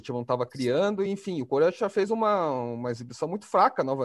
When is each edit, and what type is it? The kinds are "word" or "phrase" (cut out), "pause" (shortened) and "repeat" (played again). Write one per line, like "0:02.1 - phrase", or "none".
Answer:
none